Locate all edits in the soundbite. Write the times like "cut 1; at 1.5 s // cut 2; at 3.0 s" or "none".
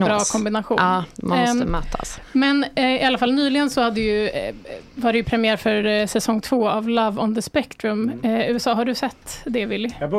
none